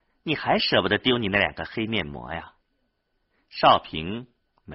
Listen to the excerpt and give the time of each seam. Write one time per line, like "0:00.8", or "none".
0:02.6